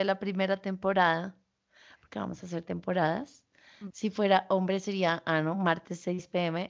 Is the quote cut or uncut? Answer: uncut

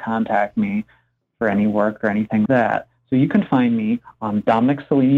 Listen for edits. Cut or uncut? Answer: cut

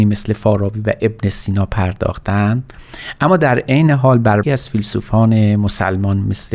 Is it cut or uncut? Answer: cut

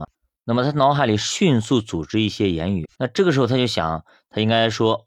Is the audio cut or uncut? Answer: cut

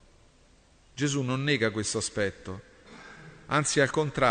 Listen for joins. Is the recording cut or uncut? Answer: uncut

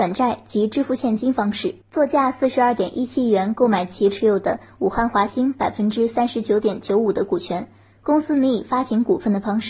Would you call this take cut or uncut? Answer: cut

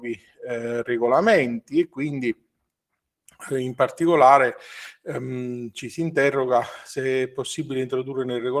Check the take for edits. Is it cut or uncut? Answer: uncut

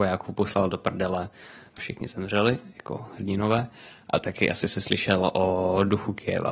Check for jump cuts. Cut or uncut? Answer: cut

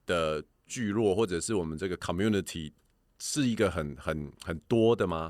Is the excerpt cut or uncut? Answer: uncut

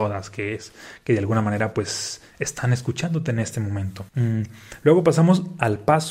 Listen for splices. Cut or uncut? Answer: cut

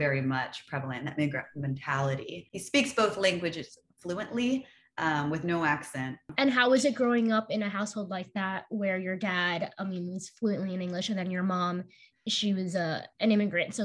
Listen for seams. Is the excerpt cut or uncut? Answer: uncut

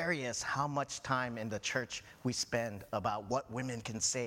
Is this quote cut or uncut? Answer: uncut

